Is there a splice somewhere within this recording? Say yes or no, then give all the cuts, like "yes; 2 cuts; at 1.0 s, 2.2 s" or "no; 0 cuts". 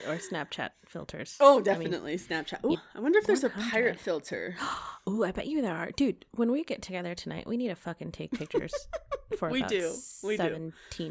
yes; 1 cut; at 2.7 s